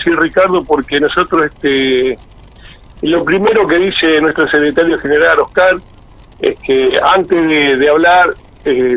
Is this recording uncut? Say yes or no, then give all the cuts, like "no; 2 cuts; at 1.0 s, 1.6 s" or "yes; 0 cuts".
yes; 0 cuts